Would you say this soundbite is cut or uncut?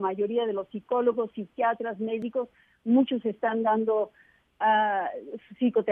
uncut